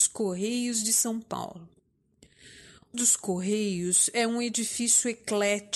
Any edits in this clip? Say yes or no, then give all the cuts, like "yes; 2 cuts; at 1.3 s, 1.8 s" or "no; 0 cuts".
yes; 1 cut; at 2.9 s